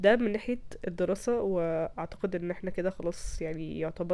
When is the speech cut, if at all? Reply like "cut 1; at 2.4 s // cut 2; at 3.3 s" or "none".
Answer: none